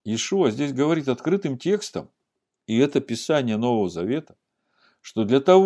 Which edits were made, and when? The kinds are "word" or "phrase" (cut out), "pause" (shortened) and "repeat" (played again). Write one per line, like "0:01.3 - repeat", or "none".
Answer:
none